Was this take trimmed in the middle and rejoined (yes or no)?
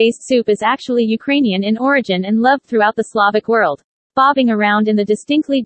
no